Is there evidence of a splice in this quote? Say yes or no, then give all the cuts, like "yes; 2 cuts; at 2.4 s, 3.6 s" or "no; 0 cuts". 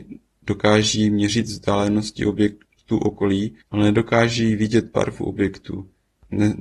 yes; 1 cut; at 3.6 s